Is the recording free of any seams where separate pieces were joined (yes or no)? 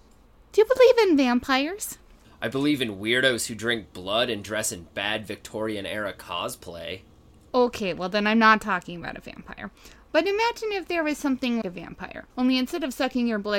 no